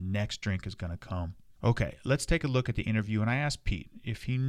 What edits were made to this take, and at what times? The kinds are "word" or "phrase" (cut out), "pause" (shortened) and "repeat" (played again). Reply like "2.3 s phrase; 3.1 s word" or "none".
1.4 s pause

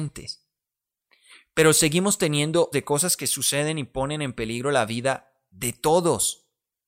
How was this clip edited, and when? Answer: 2.7 s phrase

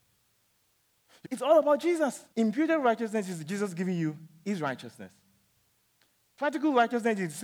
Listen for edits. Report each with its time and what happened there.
1.2 s phrase; 2.3 s pause

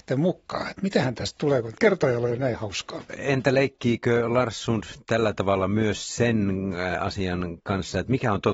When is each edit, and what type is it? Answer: none

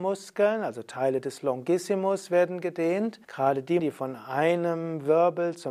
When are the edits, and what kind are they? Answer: 3.2 s pause; 3.8 s word

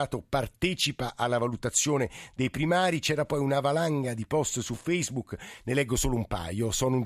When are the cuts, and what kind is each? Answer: none

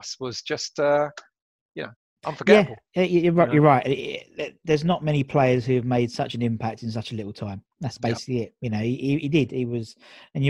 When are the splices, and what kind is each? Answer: 7.6 s pause

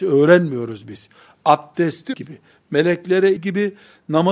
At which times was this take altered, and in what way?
2.1 s word; 3.4 s phrase

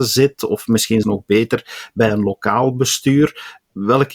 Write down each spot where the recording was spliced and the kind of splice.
1.0 s word

